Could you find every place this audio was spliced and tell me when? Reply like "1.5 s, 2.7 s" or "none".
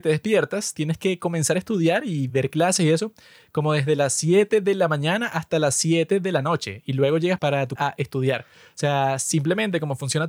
7.8 s